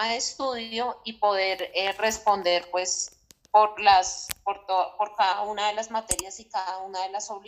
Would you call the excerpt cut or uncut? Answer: uncut